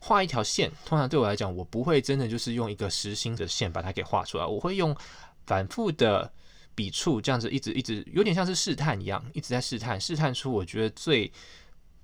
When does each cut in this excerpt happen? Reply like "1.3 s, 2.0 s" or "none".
3.4 s